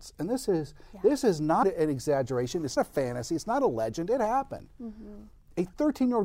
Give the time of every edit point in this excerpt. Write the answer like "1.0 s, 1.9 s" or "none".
1.6 s, 2.8 s